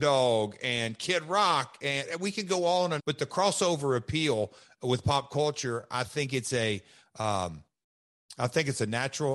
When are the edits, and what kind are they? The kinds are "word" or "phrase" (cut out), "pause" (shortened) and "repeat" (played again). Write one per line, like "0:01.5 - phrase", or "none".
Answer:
0:03.0 - word